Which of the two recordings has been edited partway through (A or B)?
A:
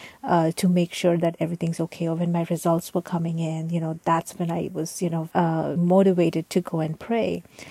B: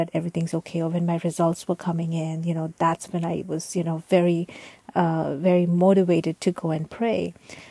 A